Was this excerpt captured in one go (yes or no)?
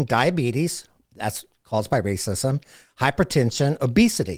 yes